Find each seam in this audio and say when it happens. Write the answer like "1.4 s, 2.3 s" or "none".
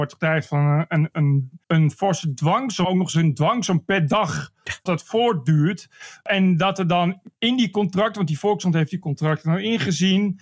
1.6 s, 2.8 s, 4.9 s